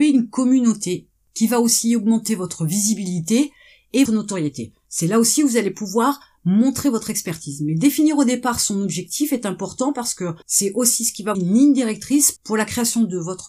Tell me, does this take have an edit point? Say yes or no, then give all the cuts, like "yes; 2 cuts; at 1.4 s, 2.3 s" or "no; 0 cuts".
yes; 3 cuts; at 4.1 s, 10.4 s, 11.3 s